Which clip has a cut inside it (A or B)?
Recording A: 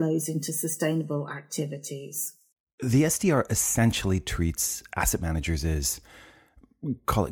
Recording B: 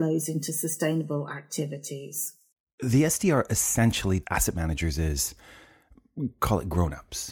B